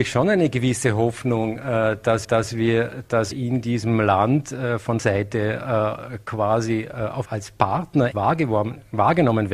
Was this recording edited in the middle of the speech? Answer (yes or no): yes